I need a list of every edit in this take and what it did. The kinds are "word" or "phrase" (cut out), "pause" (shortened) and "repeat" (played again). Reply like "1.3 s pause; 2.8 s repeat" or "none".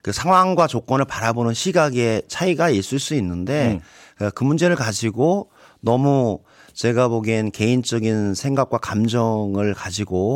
none